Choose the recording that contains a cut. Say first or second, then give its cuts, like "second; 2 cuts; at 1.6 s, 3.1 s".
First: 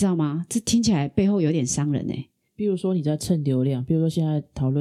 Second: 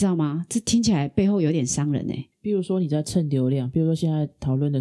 second; 1 cut; at 2.3 s